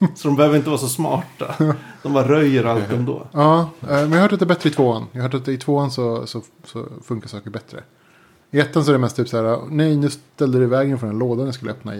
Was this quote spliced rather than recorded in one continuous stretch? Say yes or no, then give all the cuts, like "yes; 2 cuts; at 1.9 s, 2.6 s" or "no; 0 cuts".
no; 0 cuts